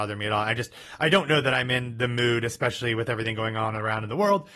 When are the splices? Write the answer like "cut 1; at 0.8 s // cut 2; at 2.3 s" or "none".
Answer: none